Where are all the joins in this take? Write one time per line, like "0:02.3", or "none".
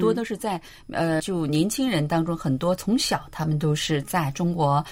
0:01.2